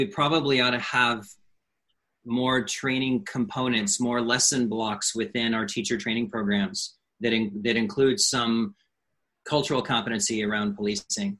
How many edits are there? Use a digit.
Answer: 0